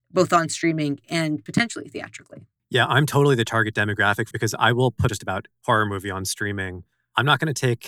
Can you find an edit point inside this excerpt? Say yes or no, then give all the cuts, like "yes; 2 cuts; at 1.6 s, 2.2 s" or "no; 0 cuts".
yes; 3 cuts; at 4.3 s, 5.1 s, 5.5 s